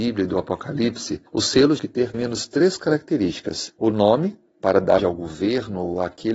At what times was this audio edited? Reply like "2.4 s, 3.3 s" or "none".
1.3 s, 1.8 s, 2.1 s, 3.8 s, 4.5 s, 5.0 s

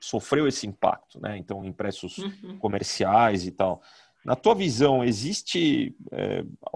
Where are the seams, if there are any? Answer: none

